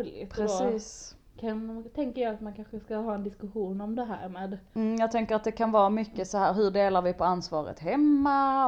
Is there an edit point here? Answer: no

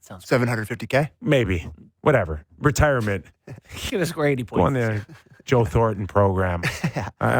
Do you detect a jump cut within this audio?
yes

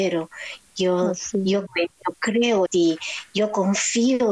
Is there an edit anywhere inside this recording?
yes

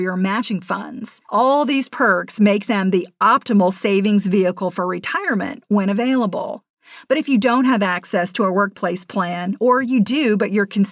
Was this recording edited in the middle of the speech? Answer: yes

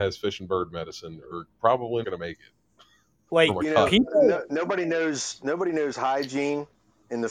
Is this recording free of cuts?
no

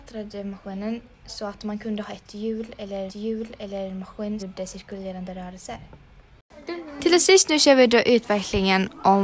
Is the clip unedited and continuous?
no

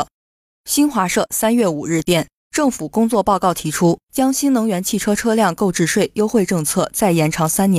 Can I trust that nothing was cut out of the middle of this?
no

